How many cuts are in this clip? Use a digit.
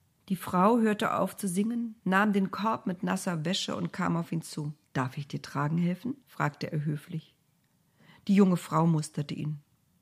3